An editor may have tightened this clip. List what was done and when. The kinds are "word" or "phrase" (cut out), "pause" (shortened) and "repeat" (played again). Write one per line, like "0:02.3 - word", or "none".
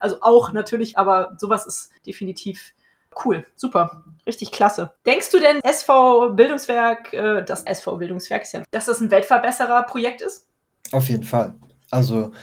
0:00.9 - word
0:02.0 - pause
0:05.6 - phrase
0:07.7 - word
0:08.6 - word
0:10.7 - pause